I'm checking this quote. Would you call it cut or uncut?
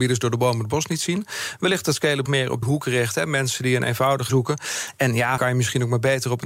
cut